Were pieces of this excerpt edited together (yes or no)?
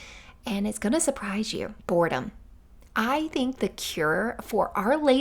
yes